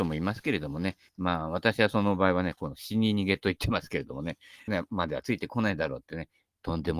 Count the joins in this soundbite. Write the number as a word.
two